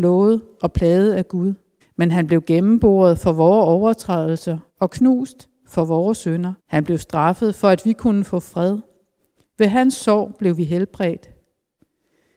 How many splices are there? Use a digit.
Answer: 3